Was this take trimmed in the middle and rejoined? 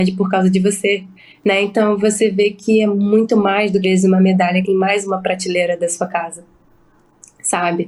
yes; 3 cuts; at 1.2 s, 3.8 s, 4.6 s

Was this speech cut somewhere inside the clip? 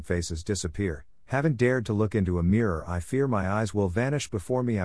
no; 0 cuts

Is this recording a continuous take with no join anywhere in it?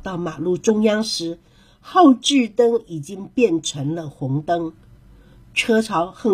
yes; 0 cuts

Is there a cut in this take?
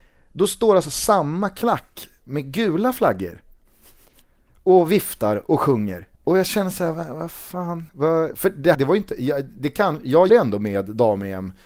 yes; 5 cuts; at 6.1 s, 6.9 s, 7.9 s, 8.7 s, 10.3 s

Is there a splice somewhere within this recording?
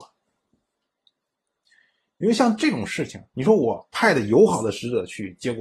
yes; 1 cut; at 3.3 s

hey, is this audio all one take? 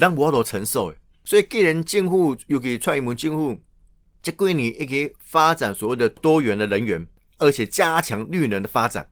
yes; 0 cuts

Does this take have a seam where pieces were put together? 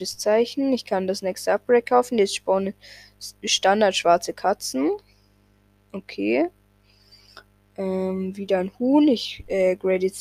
no; 0 cuts

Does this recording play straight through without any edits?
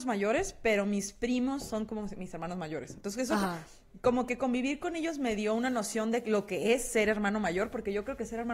yes; 0 cuts

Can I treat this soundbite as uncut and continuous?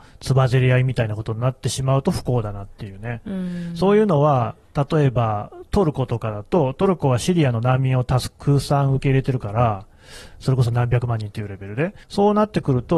no; 1 cut; at 12.0 s

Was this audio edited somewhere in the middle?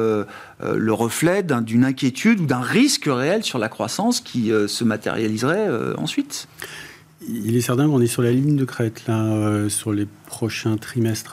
no; 0 cuts

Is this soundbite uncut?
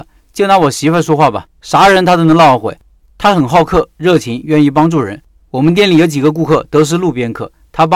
yes; 0 cuts

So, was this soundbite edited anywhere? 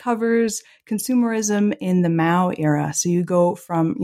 no; 0 cuts

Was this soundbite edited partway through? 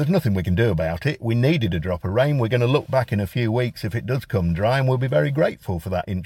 no; 0 cuts

